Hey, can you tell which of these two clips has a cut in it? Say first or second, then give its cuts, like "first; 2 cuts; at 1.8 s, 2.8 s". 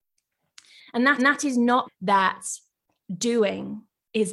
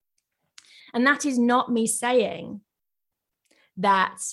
first; 2 cuts; at 1.2 s, 1.8 s